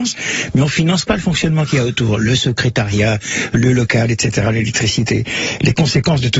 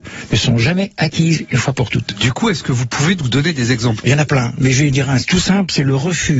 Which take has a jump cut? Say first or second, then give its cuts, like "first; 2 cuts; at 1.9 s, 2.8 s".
second; 1 cut; at 4.0 s